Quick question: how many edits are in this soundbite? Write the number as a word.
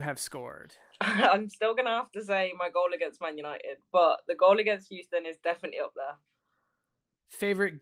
zero